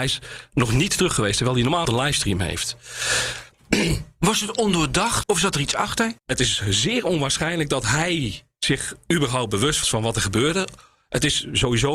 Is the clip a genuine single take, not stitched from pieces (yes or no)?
no